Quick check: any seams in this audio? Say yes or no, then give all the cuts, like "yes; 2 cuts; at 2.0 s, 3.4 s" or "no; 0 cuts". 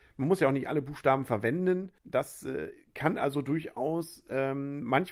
yes; 1 cut; at 2.0 s